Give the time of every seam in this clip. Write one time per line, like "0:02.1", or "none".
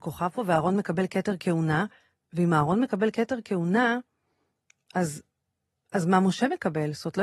none